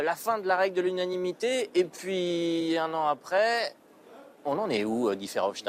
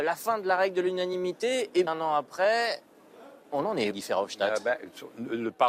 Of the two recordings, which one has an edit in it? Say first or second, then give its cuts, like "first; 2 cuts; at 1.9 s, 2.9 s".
second; 2 cuts; at 1.9 s, 3.9 s